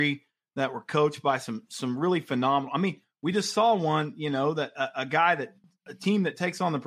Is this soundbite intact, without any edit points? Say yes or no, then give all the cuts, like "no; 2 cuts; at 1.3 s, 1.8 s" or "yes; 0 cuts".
yes; 0 cuts